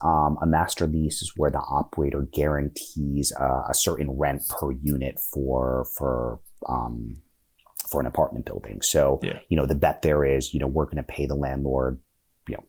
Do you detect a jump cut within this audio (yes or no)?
no